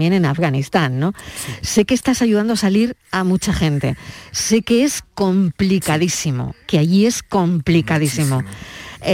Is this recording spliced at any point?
no; 0 cuts

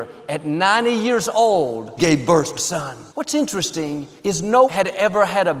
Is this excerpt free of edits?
no; 5 cuts; at 2.0 s, 2.5 s, 3.1 s, 4.2 s, 4.6 s

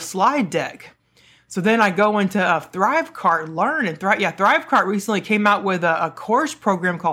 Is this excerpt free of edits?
yes; 0 cuts

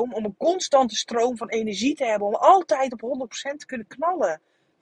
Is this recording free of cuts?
yes; 0 cuts

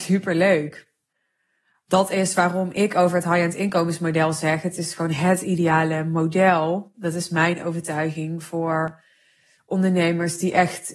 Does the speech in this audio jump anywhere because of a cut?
no; 0 cuts

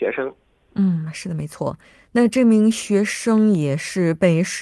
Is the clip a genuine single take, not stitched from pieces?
no; 1 cut; at 1.8 s

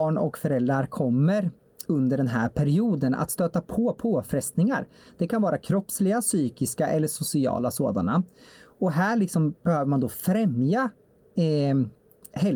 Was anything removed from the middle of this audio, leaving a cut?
no; 0 cuts

